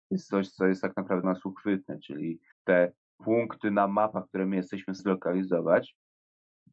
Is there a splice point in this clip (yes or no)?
yes